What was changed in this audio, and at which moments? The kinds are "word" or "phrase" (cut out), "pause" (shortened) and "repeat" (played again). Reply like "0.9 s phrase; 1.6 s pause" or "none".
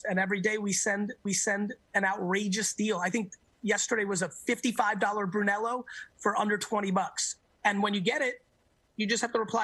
1.3 s repeat